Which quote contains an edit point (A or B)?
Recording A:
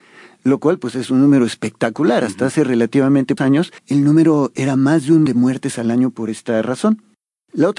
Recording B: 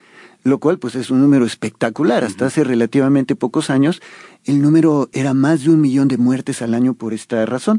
A